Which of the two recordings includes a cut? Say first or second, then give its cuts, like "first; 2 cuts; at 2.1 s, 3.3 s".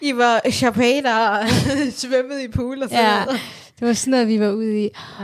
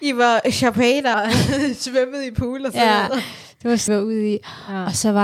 second; 2 cuts; at 1.1 s, 3.9 s